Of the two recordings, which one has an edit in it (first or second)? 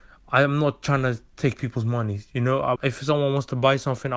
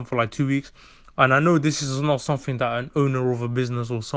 first